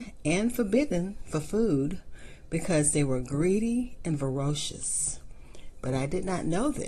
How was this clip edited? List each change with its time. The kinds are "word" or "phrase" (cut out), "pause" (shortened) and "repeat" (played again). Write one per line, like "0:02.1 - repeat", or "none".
none